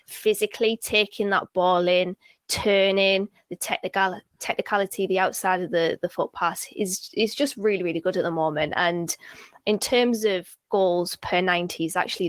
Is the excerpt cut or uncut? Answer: uncut